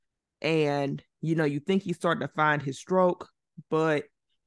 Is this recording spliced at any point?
no; 0 cuts

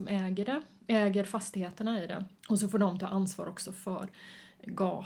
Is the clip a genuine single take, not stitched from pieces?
no; 1 cut; at 2.4 s

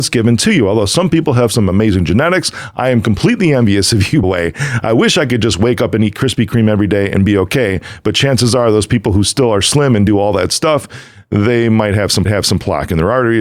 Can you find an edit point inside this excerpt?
yes; 2 cuts; at 4.2 s, 12.3 s

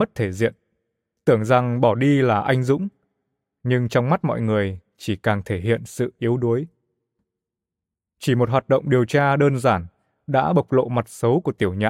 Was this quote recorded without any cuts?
yes; 0 cuts

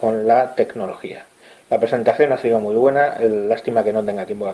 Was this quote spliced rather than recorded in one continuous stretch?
no; 0 cuts

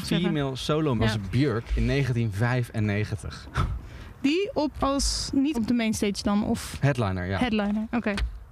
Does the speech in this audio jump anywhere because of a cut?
yes; 3 cuts; at 1.0 s, 4.7 s, 5.5 s

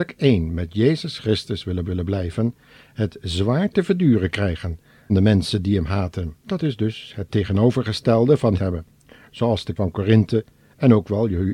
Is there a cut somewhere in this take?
yes; 5 cuts; at 1.8 s, 5.1 s, 6.4 s, 8.6 s, 9.8 s

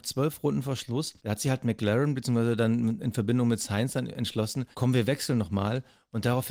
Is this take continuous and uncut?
no; 2 cuts; at 1.2 s, 4.7 s

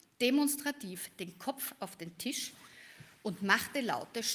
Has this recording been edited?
no; 0 cuts

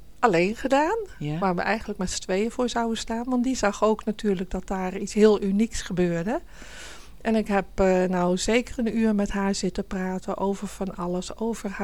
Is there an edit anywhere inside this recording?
no; 0 cuts

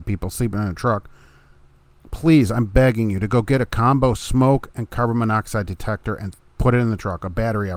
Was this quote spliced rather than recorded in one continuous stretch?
no; 0 cuts

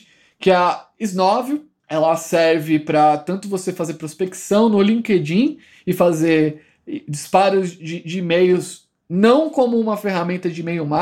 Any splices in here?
no; 0 cuts

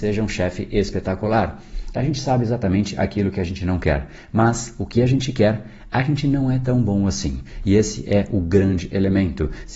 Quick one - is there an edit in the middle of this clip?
no; 0 cuts

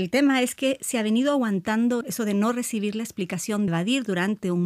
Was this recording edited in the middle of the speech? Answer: yes; 2 cuts; at 2.0 s, 3.7 s

